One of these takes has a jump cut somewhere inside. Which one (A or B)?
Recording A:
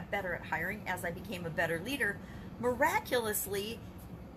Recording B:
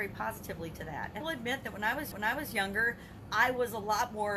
B